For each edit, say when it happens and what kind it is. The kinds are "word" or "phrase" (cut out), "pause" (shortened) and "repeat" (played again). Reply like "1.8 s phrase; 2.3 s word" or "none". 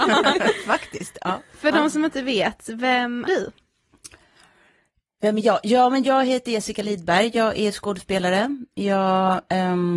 3.2 s word